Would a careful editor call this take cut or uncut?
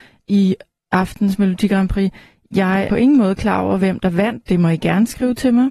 cut